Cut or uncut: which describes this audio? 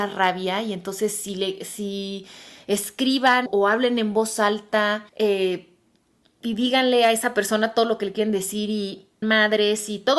cut